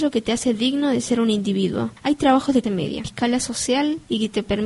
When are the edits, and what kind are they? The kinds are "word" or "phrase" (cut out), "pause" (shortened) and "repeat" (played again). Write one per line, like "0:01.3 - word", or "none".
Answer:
0:02.6 - word
0:03.0 - phrase